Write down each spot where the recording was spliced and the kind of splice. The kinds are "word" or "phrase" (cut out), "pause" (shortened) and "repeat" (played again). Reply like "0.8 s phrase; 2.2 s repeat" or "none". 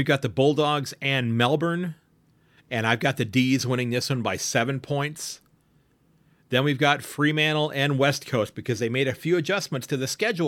none